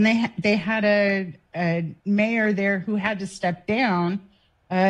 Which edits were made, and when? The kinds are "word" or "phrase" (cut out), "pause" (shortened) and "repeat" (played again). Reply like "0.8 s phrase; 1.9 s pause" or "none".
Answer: 2.0 s pause